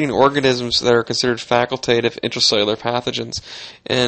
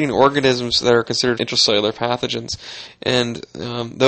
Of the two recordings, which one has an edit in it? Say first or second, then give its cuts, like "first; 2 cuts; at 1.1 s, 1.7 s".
second; 1 cut; at 1.4 s